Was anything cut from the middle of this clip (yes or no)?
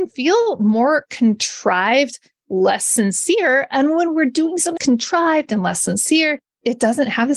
yes